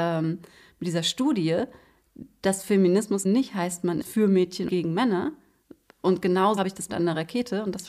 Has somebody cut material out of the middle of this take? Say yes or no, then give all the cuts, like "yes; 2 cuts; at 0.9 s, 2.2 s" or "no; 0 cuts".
yes; 5 cuts; at 3.2 s, 4.0 s, 4.7 s, 6.6 s, 6.9 s